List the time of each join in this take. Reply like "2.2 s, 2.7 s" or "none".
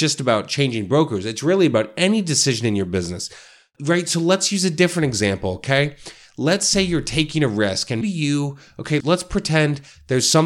8.0 s, 9.0 s